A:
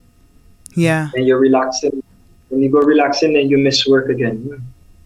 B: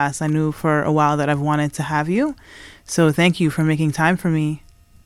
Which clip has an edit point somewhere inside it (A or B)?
A